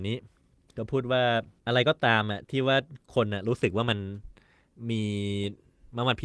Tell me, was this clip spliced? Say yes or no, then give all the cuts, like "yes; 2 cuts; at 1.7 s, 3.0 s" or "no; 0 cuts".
yes; 1 cut; at 1.6 s